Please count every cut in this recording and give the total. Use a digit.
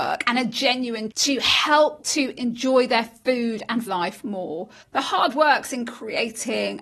4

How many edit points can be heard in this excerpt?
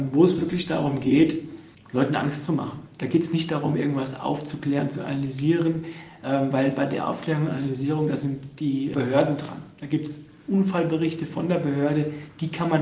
2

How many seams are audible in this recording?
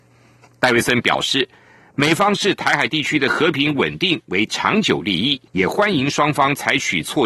1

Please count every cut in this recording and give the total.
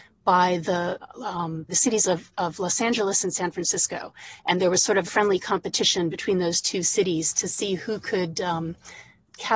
2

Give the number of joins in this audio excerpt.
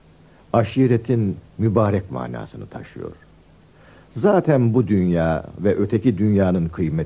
0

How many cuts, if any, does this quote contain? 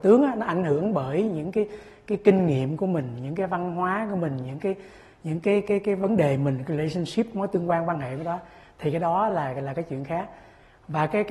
0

